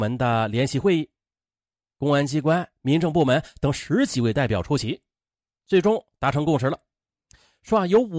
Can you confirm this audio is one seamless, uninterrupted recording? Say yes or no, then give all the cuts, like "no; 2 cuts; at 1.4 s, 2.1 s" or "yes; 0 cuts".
yes; 0 cuts